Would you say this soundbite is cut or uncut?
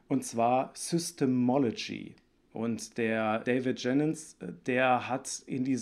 cut